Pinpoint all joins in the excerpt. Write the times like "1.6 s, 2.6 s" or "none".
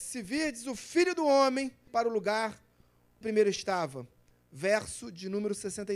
1.9 s, 3.2 s